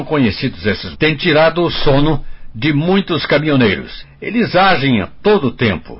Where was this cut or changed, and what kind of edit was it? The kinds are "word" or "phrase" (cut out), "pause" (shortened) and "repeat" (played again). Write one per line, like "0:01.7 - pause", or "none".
0:00.9 - word